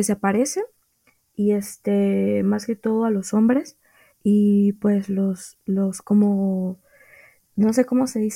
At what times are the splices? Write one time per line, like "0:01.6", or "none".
none